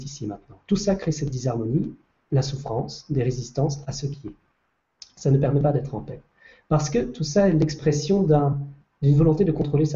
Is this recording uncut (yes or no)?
yes